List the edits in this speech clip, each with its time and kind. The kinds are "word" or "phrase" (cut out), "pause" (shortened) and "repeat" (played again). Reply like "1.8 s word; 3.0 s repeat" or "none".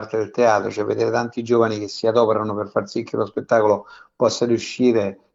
none

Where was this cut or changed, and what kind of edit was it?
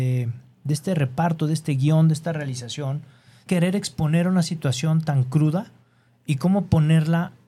3.5 s phrase

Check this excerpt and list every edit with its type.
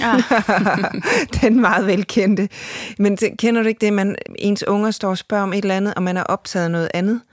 4.3 s pause

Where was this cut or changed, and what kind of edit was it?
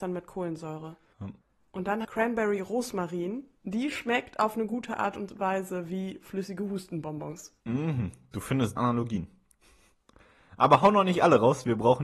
1.4 s pause; 2.0 s phrase; 3.5 s pause; 7.6 s pause; 8.8 s phrase

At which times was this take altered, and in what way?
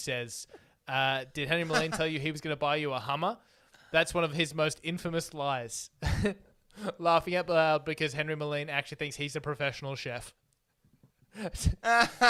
none

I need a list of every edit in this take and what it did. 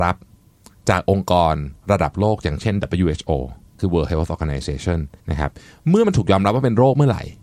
3.8 s phrase; 5.2 s pause

